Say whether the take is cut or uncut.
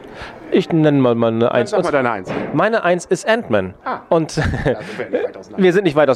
uncut